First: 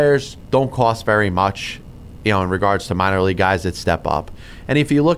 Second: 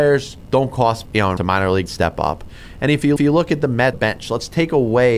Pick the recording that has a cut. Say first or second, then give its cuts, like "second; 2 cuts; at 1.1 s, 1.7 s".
second; 5 cuts; at 1.0 s, 1.4 s, 1.9 s, 3.2 s, 3.9 s